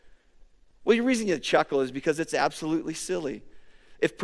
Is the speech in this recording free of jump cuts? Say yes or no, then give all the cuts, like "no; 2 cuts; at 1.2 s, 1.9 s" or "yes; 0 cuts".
yes; 0 cuts